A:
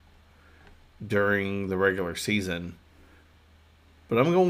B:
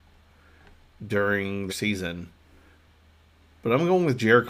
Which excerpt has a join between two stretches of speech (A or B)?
B